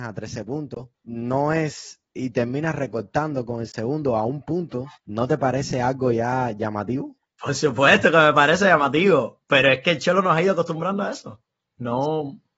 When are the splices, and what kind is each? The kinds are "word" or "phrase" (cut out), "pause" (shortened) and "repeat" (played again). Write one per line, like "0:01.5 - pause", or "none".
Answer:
0:00.9 - pause
0:02.1 - word
0:05.0 - pause